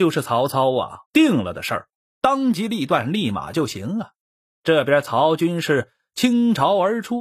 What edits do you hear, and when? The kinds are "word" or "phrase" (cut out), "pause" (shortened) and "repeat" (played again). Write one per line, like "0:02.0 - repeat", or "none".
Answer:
0:01.0 - pause
0:01.9 - pause
0:04.2 - pause